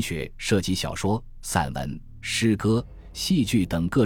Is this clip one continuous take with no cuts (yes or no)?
yes